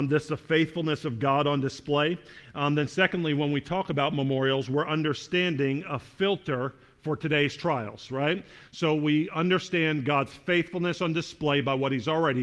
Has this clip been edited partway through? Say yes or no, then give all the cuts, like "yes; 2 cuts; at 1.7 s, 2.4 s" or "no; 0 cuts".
no; 0 cuts